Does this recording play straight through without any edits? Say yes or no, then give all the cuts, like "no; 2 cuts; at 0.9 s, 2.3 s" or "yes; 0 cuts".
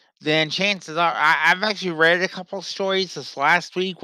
yes; 0 cuts